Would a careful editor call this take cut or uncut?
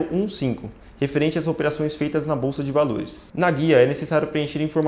uncut